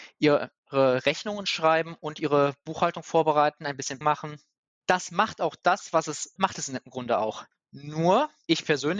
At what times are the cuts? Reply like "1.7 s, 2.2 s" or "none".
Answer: 4.0 s, 6.4 s